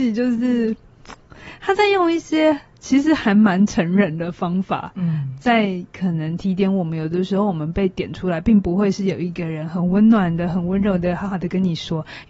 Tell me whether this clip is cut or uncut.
uncut